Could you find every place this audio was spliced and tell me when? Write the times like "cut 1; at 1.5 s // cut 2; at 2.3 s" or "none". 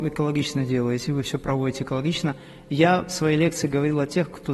none